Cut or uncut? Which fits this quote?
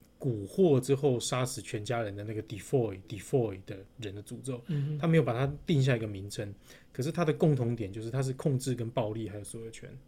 cut